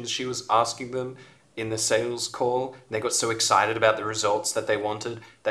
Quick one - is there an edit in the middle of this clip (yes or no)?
no